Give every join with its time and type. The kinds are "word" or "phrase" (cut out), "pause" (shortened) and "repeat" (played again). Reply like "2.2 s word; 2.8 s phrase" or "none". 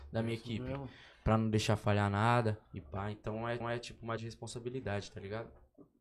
2.6 s pause; 3.6 s repeat; 4.2 s word